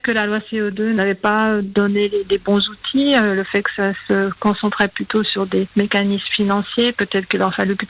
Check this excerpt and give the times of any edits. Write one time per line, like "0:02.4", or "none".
none